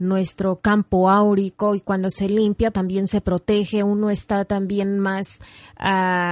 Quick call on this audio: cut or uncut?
cut